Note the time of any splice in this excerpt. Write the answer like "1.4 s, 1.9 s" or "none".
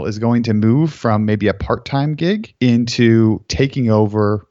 2.6 s